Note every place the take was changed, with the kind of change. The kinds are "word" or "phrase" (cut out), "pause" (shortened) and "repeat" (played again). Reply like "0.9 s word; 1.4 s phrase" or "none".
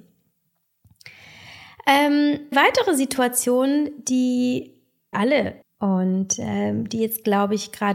2.5 s word; 5.1 s word; 5.6 s word